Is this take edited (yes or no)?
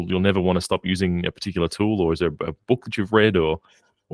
no